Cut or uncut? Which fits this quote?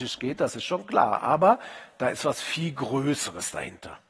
uncut